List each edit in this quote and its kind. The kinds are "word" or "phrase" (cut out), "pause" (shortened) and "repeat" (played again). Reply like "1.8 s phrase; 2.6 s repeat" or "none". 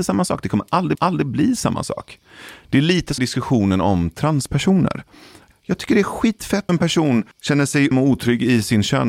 0.9 s repeat; 3.2 s phrase; 5.5 s phrase; 6.7 s word; 7.3 s pause; 7.9 s word